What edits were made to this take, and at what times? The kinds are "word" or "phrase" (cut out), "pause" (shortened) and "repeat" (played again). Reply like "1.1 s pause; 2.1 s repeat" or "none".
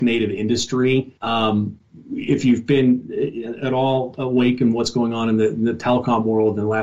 1.2 s pause